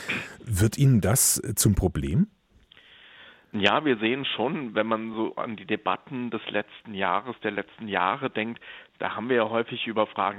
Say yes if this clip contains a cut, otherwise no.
no